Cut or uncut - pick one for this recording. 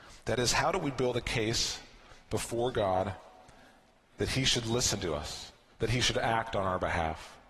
uncut